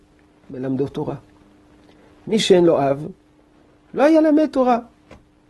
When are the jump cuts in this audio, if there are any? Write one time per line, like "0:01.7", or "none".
none